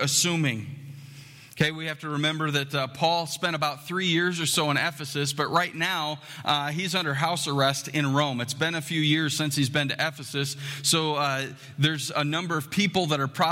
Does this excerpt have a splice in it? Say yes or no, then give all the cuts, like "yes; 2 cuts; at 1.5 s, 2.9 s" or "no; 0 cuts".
no; 0 cuts